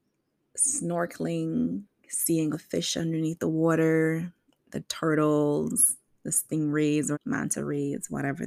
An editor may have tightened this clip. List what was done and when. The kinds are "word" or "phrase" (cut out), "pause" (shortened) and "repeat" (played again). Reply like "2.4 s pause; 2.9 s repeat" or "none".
2.5 s word; 7.1 s word